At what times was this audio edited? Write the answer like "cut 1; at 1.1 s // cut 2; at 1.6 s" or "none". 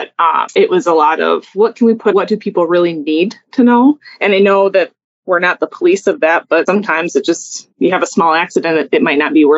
cut 1; at 2.1 s // cut 2; at 7.7 s